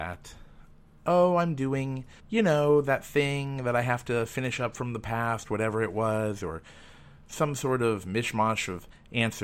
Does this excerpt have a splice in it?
yes; 1 cut; at 2.2 s

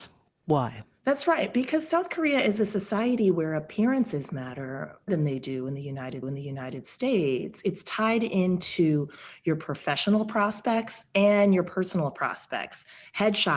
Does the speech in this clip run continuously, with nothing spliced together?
no; 2 cuts; at 5.1 s, 6.2 s

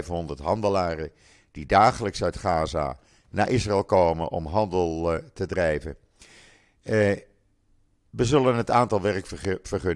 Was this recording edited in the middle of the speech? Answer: no; 0 cuts

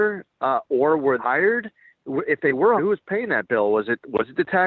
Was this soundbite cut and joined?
yes; 2 cuts; at 1.2 s, 2.8 s

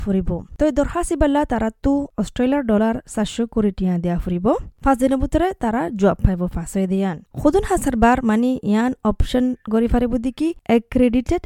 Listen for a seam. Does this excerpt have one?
no; 0 cuts

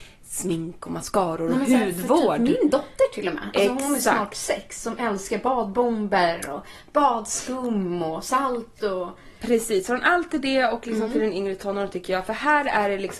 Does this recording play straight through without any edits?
yes; 0 cuts

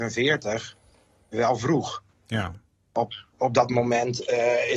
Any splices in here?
no; 0 cuts

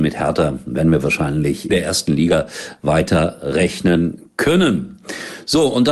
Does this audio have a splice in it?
yes; 1 cut; at 1.7 s

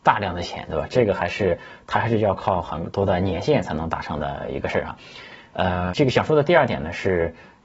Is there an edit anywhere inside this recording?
yes; 1 cut; at 5.9 s

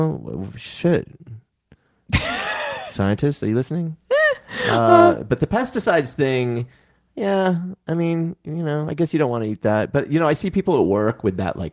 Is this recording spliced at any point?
no; 0 cuts

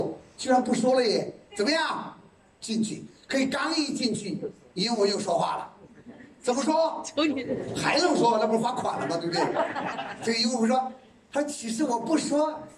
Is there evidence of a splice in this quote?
no; 0 cuts

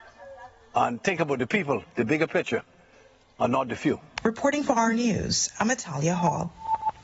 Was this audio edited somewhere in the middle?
no; 0 cuts

